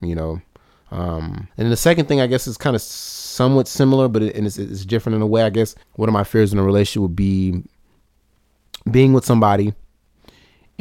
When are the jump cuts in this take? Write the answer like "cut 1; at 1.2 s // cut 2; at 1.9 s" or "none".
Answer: cut 1; at 1.5 s // cut 2; at 5.8 s